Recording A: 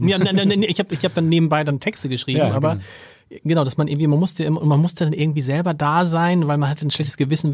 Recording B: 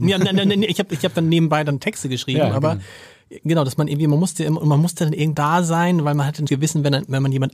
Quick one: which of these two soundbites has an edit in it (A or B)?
B